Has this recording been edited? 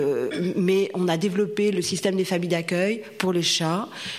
no; 0 cuts

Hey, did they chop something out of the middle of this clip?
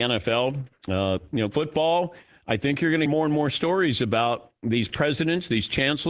yes; 2 cuts; at 1.5 s, 3.1 s

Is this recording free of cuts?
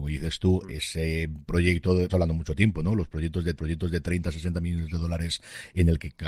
no; 2 cuts; at 2.1 s, 3.6 s

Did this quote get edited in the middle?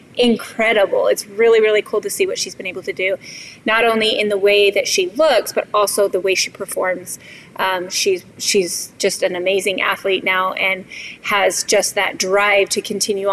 yes; 1 cut; at 8.3 s

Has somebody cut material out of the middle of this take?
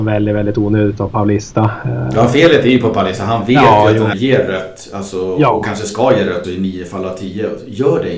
yes; 2 cuts; at 4.1 s, 6.4 s

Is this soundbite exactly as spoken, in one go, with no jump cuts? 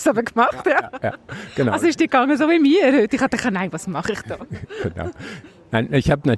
yes; 0 cuts

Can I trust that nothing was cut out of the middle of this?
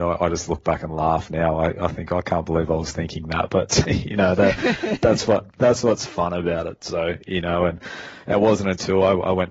no; 1 cut; at 3.8 s

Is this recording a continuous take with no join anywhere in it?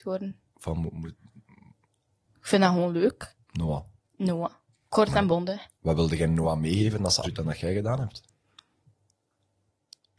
no; 1 cut; at 7.2 s

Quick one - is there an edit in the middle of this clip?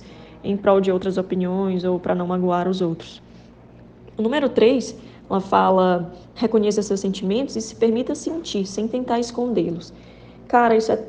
no; 0 cuts

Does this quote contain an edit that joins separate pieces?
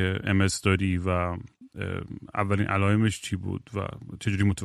no; 0 cuts

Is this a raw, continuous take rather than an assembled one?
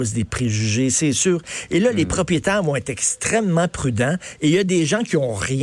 yes; 0 cuts

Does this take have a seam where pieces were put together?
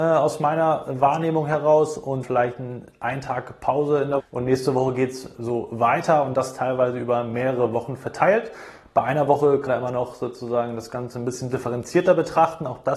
yes; 4 cuts; at 2.2 s, 4.2 s, 5.4 s, 9.7 s

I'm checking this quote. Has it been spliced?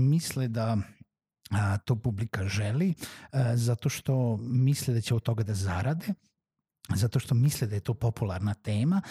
no; 0 cuts

